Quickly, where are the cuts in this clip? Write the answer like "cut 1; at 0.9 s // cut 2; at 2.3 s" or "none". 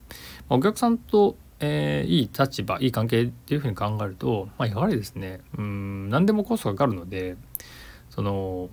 cut 1; at 5.5 s